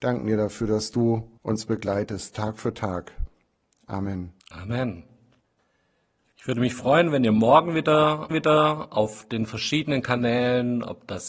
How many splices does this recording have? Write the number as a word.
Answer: three